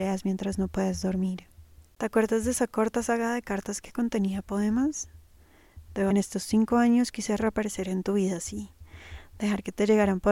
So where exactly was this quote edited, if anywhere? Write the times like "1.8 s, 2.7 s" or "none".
6.1 s